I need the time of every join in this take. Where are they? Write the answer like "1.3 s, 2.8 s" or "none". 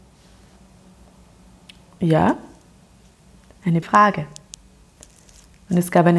3.8 s